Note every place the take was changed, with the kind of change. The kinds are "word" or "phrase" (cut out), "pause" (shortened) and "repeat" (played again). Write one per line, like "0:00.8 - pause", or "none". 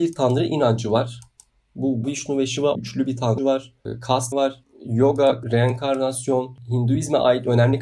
0:02.0 - word
0:02.7 - word
0:03.4 - word
0:04.3 - word
0:05.4 - word